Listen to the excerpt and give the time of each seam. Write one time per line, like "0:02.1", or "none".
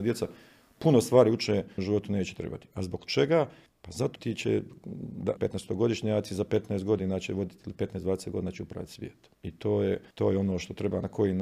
0:01.8
0:03.7
0:04.2
0:05.4
0:09.3
0:10.1